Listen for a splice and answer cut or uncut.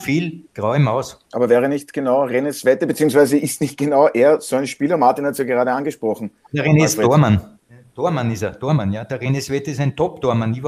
cut